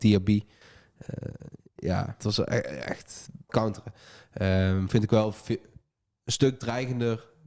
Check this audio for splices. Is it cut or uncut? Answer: cut